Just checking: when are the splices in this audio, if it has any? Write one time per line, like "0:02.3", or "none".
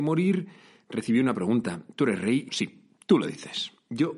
0:02.5